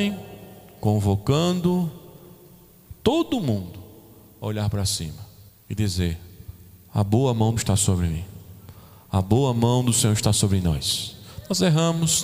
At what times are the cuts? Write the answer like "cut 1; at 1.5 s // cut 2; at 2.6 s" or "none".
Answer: cut 1; at 5.5 s // cut 2; at 7.6 s

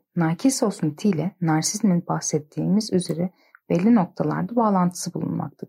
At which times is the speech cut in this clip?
none

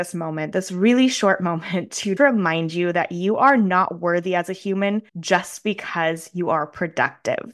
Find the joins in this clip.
cut 1; at 2.2 s // cut 2; at 5.1 s

